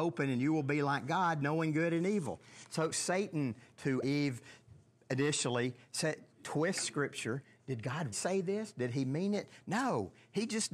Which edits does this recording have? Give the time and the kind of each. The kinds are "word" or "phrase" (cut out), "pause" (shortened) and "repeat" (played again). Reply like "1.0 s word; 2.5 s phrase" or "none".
2.9 s word; 4.0 s phrase; 6.3 s pause; 7.5 s phrase; 8.1 s word